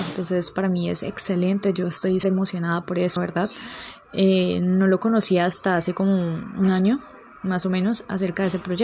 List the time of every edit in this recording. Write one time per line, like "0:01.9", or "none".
0:02.2
0:03.2